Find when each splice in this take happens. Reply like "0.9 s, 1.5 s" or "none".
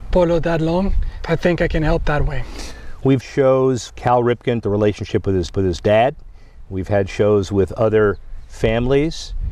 2.0 s, 3.2 s, 3.9 s, 4.6 s, 5.5 s